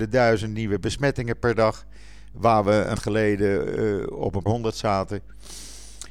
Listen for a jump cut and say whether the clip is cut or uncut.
cut